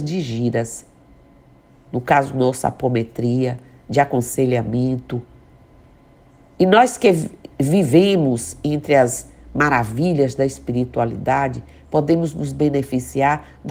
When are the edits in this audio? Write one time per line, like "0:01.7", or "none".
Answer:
none